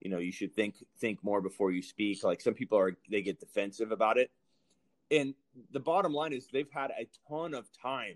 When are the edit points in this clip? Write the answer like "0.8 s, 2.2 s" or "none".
none